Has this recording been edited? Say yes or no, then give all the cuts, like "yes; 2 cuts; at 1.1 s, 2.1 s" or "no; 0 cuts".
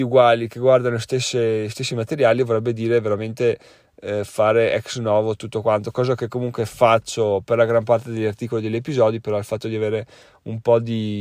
no; 0 cuts